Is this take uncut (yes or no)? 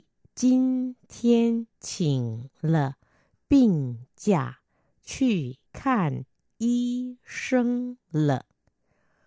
no